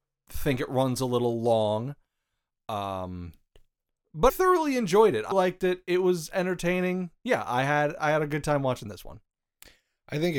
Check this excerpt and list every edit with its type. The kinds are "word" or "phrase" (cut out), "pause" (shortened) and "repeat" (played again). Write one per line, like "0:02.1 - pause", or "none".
0:04.3 - word
0:05.3 - word